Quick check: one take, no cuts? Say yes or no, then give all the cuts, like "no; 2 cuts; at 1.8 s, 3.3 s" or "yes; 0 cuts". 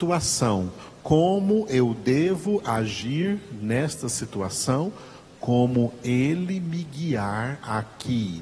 yes; 0 cuts